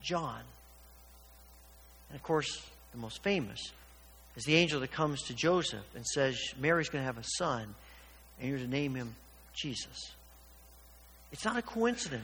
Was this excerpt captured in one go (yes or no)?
yes